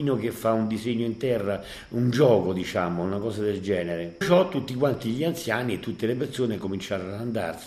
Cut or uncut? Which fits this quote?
cut